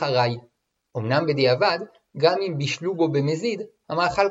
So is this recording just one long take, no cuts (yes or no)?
yes